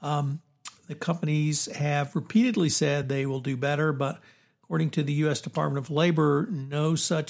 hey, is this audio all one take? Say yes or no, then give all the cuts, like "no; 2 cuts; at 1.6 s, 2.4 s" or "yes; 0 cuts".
yes; 0 cuts